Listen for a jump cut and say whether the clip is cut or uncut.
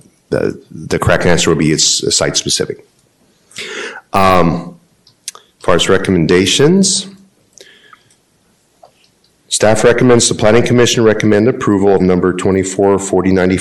cut